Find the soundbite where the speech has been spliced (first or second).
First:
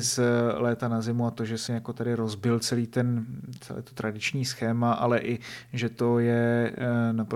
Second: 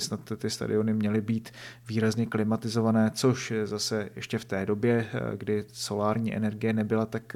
first